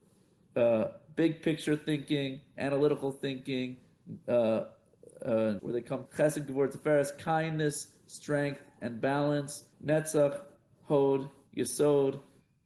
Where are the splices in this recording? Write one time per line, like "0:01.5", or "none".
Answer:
0:05.6
0:06.1
0:09.7